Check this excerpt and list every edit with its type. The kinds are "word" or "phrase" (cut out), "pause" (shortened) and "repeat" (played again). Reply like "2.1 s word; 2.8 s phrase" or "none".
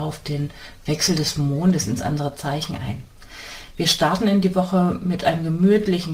none